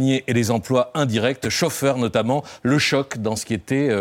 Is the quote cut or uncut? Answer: uncut